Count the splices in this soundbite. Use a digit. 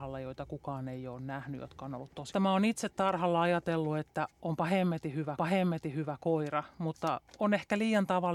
2